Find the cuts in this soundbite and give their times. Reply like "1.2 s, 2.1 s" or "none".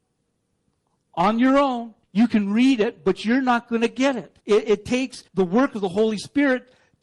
2.0 s, 4.4 s, 5.3 s